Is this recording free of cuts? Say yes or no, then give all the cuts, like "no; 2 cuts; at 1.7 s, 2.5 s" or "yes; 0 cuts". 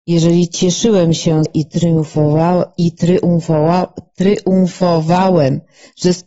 no; 1 cut; at 1.5 s